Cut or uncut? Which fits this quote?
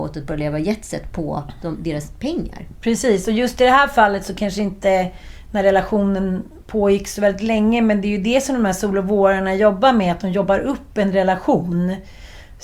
uncut